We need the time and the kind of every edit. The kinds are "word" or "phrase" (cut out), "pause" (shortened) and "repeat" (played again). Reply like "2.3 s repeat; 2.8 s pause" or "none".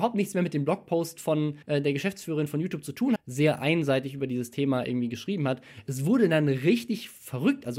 1.6 s pause; 3.2 s phrase